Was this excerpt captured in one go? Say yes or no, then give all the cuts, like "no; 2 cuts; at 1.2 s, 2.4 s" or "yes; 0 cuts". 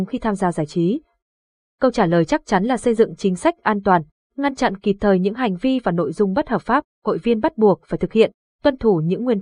yes; 0 cuts